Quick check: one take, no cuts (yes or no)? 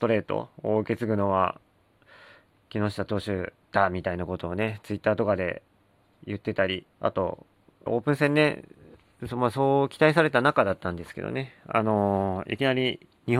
no